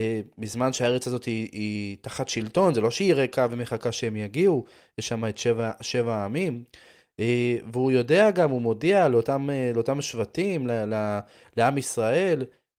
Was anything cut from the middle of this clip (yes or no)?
no